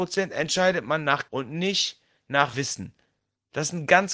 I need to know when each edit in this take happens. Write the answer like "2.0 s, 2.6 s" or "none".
1.3 s, 2.5 s